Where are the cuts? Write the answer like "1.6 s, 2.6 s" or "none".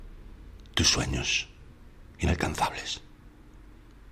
2.1 s